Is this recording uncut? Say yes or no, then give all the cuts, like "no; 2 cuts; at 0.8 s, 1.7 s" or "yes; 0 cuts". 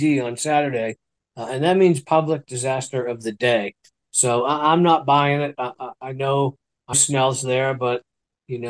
no; 1 cut; at 6.9 s